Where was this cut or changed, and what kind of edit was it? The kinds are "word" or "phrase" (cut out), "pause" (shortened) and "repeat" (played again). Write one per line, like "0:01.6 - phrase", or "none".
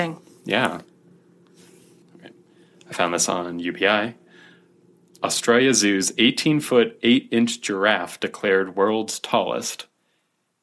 none

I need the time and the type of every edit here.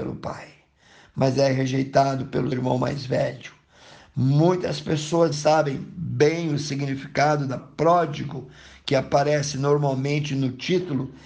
0:02.5 - word
0:05.3 - word
0:07.6 - word

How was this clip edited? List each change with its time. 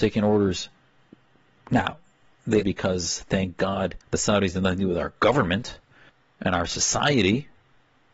0:02.6 - word
0:04.0 - pause
0:06.1 - pause

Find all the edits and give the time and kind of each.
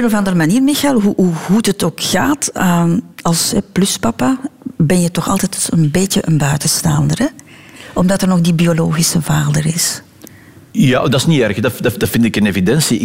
none

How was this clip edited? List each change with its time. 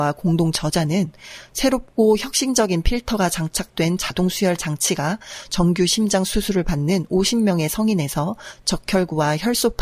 none

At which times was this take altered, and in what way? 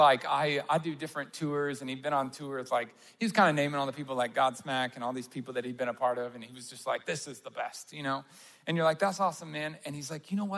none

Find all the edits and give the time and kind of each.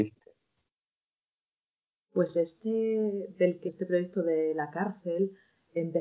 0:03.7 - word

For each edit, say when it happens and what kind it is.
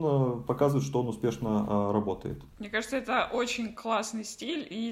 0:02.5 - pause

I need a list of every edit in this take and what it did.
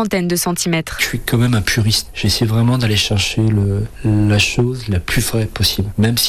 none

